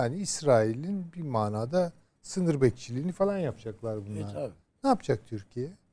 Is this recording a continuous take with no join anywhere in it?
yes; 0 cuts

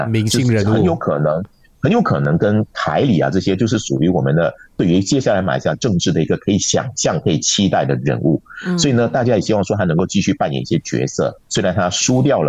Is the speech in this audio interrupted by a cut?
no; 0 cuts

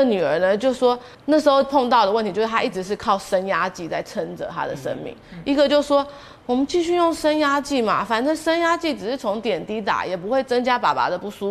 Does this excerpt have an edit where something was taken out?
yes; 1 cut; at 1.1 s

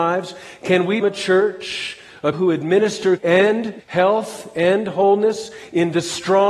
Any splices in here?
yes; 4 cuts; at 1.0 s, 2.3 s, 3.2 s, 3.8 s

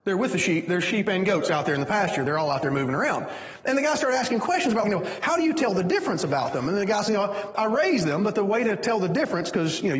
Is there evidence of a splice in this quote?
yes; 2 cuts; at 4.8 s, 7.1 s

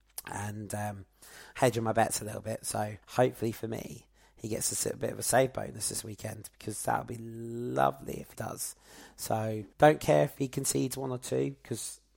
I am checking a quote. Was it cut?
yes; 3 cuts; at 3.0 s, 8.3 s, 9.7 s

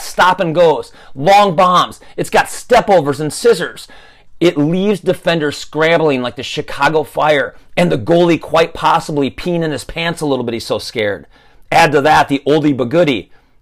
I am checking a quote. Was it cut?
no; 0 cuts

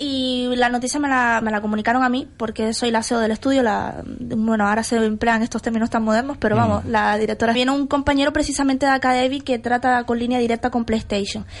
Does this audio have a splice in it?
yes; 2 cuts; at 1.4 s, 7.5 s

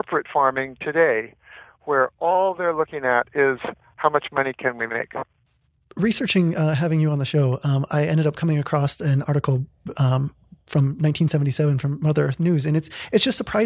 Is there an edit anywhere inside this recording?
no; 0 cuts

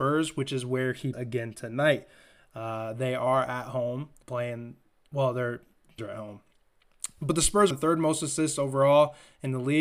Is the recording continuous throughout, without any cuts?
no; 4 cuts; at 1.1 s, 4.2 s, 6.0 s, 7.7 s

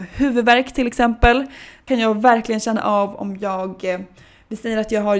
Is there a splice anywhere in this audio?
yes; 1 cut; at 1.9 s

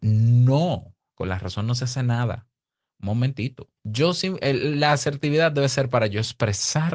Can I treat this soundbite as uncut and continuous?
no; 1 cut; at 3.8 s

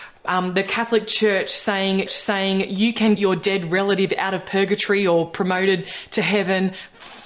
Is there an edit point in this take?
yes; 2 cuts; at 2.1 s, 3.2 s

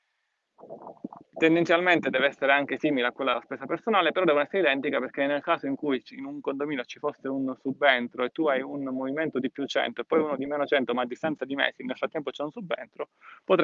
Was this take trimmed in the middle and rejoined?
no; 0 cuts

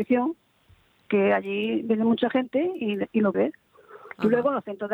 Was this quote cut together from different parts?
yes; 1 cut; at 3.3 s

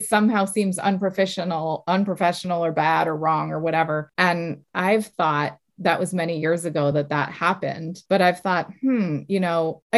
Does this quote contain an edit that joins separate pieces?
no; 0 cuts

